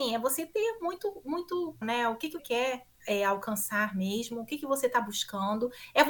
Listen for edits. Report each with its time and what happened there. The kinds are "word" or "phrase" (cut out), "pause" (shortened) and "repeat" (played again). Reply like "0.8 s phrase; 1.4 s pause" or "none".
1.8 s word; 2.4 s word